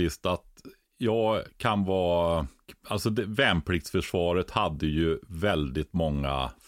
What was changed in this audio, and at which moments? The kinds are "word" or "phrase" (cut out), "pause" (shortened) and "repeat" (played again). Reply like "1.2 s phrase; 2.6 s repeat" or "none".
none